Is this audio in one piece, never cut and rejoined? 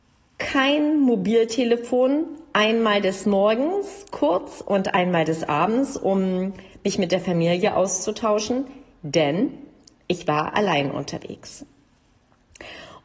yes; 0 cuts

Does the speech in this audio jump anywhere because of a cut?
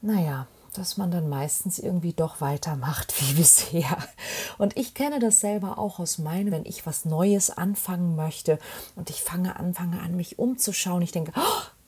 yes; 2 cuts; at 6.5 s, 9.7 s

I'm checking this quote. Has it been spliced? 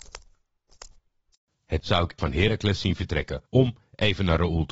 yes; 3 cuts; at 1.8 s, 2.2 s, 3.5 s

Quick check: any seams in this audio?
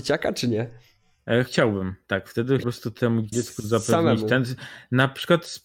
yes; 2 cuts; at 2.6 s, 3.3 s

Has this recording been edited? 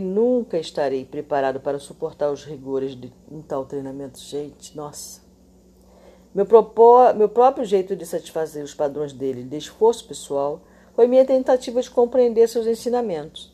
no; 0 cuts

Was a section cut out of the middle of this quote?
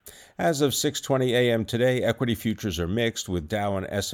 no; 0 cuts

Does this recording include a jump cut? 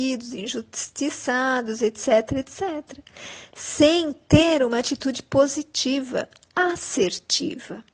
no; 0 cuts

